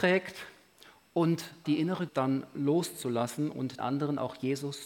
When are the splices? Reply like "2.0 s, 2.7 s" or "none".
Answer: 1.6 s, 2.1 s, 3.8 s